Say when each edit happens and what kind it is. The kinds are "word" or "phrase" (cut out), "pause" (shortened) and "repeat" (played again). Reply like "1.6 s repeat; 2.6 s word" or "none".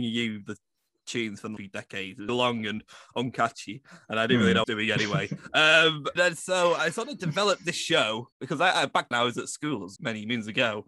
1.6 s word; 2.3 s word; 4.6 s phrase; 6.2 s word; 8.3 s pause; 9.1 s word; 10.0 s word